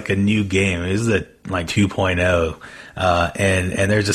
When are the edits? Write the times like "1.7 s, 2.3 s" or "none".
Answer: 1.7 s